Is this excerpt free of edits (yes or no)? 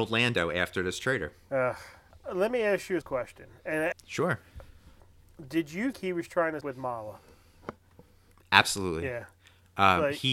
no